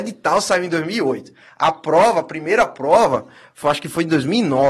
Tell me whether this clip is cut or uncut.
uncut